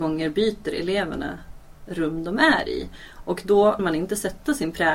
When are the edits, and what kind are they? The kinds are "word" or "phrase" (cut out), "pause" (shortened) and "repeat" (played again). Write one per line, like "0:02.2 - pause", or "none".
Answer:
0:03.8 - word

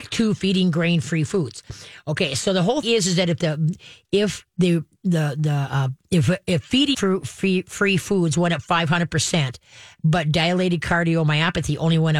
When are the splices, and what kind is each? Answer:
0:02.8 - word
0:04.5 - word
0:06.9 - word

